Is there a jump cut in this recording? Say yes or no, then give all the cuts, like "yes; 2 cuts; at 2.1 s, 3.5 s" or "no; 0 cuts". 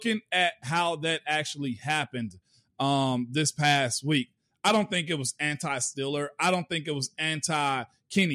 no; 0 cuts